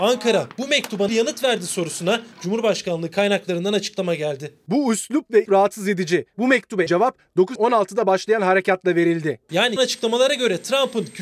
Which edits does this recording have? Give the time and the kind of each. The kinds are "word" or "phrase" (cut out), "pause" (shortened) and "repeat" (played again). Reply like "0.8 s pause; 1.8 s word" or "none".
1.1 s phrase; 2.3 s pause; 5.5 s phrase; 6.9 s phrase; 7.6 s word; 9.8 s word